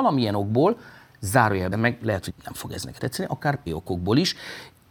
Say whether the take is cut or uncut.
cut